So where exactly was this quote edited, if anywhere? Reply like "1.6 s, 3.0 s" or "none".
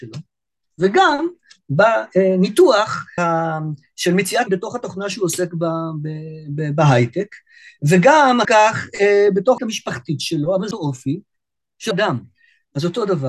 3.2 s, 4.5 s, 8.4 s, 9.6 s, 10.7 s, 11.9 s